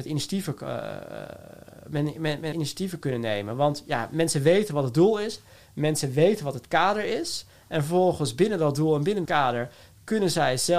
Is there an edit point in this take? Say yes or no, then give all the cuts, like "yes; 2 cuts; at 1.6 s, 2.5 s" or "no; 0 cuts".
yes; 3 cuts; at 2.1 s, 2.5 s, 9.2 s